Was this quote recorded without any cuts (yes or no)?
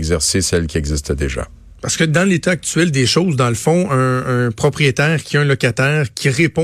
yes